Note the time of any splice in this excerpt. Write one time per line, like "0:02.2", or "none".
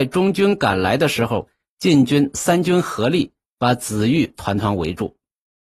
none